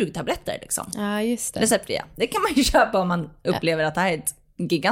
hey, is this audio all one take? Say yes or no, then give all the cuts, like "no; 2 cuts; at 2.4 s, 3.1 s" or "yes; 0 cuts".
yes; 0 cuts